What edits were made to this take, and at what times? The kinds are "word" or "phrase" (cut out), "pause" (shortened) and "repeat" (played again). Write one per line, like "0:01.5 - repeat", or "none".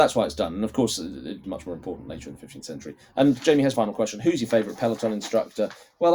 0:01.4 - word
0:03.7 - word